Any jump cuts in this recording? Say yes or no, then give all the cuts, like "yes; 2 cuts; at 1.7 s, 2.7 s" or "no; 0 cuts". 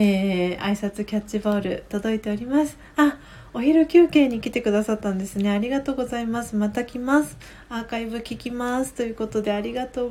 yes; 1 cut; at 1.9 s